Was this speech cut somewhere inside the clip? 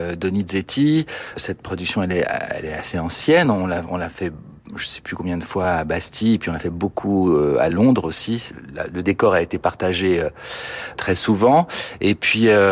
no; 0 cuts

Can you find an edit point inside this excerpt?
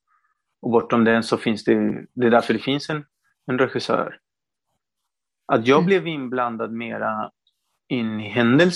no; 0 cuts

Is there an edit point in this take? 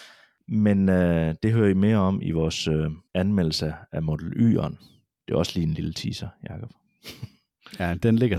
yes; 1 cut; at 3.1 s

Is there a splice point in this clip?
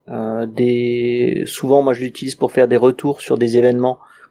no; 0 cuts

